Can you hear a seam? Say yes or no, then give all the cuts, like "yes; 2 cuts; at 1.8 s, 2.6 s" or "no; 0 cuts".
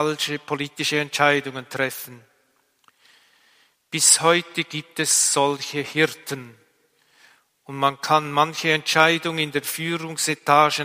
no; 0 cuts